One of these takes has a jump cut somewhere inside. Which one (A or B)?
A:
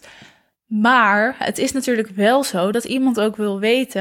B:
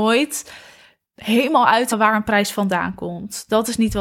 B